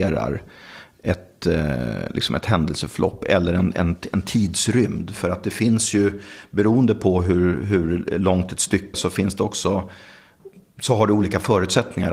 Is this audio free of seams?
no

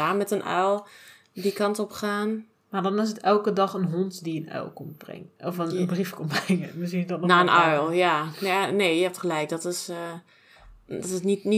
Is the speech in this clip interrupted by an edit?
no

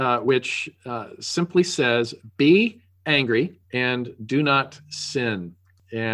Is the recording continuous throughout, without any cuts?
no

